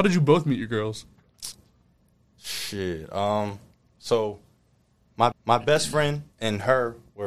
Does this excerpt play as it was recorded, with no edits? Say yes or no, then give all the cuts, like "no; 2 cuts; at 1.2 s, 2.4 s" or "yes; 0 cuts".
no; 2 cuts; at 5.3 s, 6.3 s